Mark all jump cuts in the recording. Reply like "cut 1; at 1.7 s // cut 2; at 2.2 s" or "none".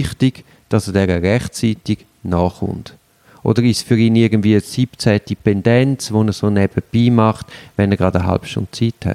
none